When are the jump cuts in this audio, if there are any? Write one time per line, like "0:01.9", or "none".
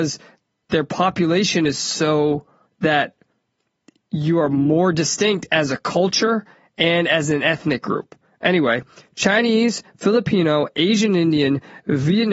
0:02.7